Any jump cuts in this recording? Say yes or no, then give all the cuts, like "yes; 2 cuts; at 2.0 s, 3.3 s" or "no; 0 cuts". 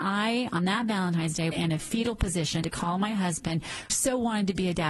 yes; 3 cuts; at 1.5 s, 2.6 s, 3.9 s